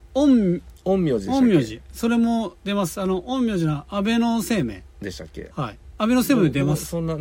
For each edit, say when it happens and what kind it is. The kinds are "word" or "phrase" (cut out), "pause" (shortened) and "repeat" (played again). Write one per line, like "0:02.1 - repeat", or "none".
none